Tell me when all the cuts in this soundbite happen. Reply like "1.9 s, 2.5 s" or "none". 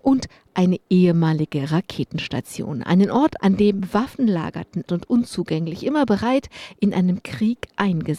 3.4 s, 4.9 s